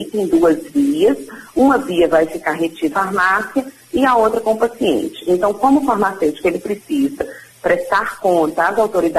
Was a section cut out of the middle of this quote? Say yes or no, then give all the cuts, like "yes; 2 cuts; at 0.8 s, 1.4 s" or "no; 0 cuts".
yes; 1 cut; at 2.9 s